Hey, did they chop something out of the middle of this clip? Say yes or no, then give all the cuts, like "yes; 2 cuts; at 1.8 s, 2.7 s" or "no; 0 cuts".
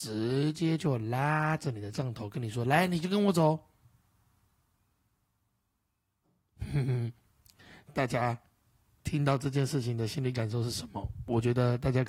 no; 0 cuts